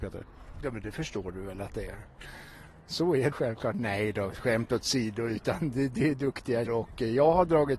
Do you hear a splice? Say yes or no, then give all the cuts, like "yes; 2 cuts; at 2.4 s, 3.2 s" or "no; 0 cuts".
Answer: yes; 2 cuts; at 3.3 s, 6.7 s